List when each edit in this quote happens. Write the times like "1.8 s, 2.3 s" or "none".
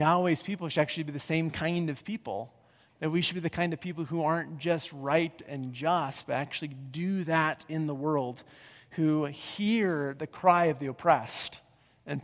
none